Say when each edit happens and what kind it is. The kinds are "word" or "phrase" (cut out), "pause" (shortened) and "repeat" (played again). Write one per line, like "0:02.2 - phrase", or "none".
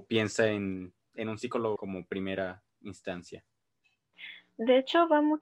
0:01.8 - phrase
0:02.7 - pause